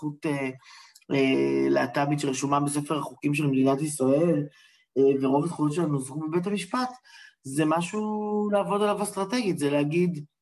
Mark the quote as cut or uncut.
uncut